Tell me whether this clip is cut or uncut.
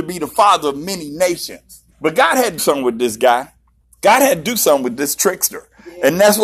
cut